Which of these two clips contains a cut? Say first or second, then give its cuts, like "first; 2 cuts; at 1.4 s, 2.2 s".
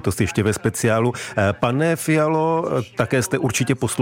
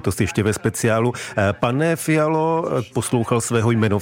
second; 1 cut; at 2.9 s